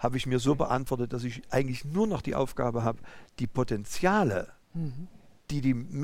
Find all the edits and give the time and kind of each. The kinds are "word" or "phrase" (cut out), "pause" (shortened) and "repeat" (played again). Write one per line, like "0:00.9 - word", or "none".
0:04.6 - pause